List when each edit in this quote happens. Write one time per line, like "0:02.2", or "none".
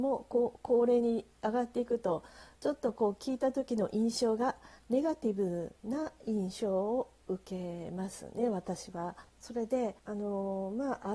0:05.8
0:09.3
0:10.0